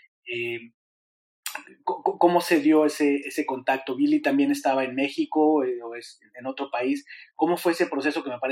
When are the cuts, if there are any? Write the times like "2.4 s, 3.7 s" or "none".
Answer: 3.2 s